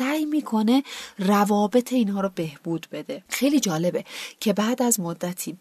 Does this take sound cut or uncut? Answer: cut